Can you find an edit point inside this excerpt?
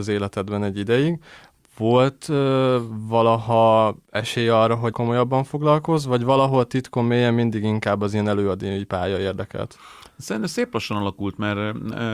yes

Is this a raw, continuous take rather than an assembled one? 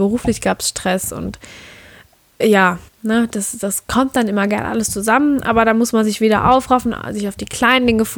no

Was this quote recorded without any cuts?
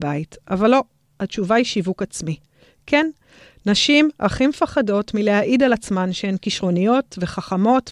yes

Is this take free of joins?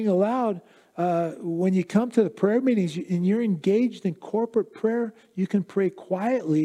yes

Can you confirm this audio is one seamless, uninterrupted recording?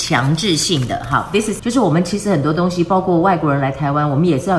no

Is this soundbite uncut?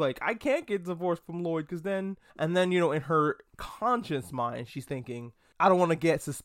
no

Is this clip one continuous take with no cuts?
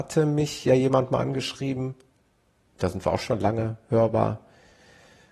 yes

